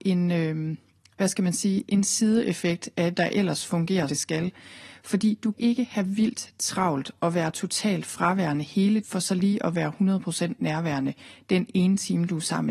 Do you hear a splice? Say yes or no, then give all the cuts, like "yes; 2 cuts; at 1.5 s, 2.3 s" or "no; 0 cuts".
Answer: yes; 4 cuts; at 3.1 s, 4.1 s, 5.5 s, 9.0 s